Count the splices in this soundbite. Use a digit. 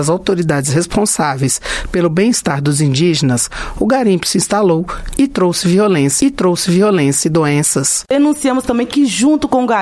1